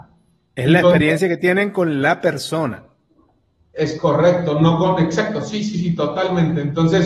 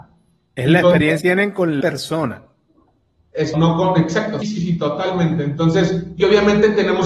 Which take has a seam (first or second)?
second